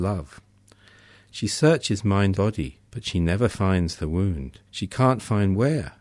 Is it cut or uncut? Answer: cut